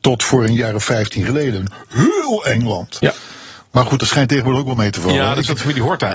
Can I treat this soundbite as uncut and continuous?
yes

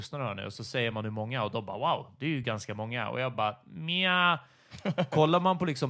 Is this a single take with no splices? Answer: yes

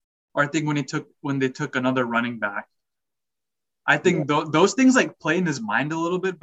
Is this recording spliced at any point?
no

